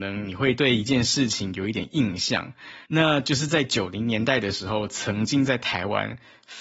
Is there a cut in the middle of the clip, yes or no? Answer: yes